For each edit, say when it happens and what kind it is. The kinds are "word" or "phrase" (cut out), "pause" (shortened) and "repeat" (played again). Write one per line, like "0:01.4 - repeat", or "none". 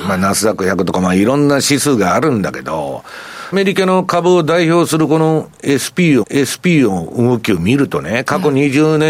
0:03.5 - phrase
0:06.2 - repeat